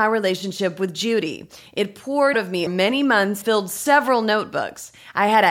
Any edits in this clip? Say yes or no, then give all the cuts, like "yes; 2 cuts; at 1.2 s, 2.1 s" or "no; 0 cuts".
yes; 3 cuts; at 2.3 s, 2.7 s, 3.4 s